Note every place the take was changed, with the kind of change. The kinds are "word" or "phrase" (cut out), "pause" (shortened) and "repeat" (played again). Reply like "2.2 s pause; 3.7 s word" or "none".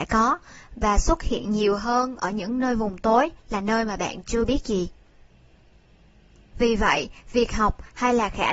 none